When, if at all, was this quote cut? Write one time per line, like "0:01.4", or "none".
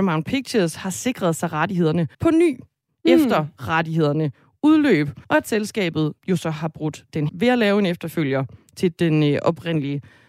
0:02.1
0:05.2
0:06.2
0:07.3